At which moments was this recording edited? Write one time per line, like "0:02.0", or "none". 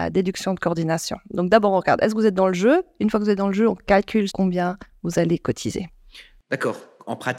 0:04.3